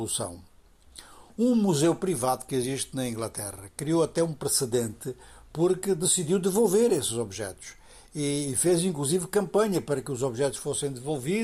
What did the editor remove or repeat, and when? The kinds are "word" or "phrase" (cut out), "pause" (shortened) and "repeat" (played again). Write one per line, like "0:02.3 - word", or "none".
none